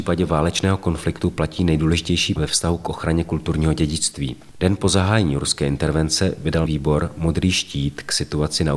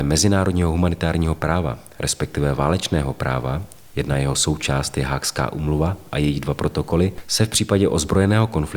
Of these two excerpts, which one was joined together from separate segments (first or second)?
first